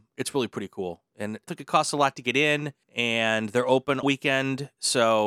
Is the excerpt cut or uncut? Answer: cut